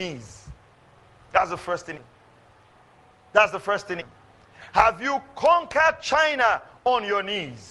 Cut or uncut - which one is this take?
cut